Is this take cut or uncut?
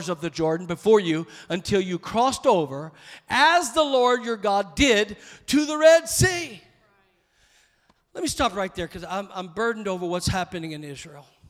uncut